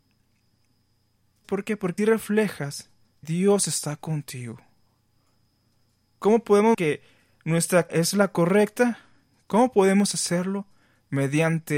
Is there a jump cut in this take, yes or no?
yes